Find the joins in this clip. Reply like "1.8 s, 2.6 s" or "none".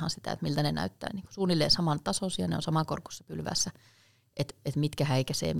1.1 s